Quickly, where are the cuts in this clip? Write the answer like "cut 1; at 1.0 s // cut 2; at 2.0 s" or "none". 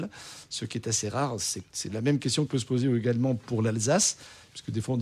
cut 1; at 2.5 s